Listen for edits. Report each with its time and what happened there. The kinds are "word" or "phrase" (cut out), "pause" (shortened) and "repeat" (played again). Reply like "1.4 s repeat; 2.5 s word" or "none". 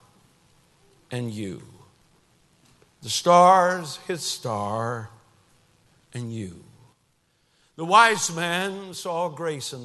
none